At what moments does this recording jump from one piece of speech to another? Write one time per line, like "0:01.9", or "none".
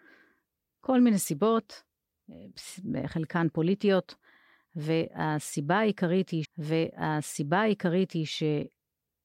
0:06.4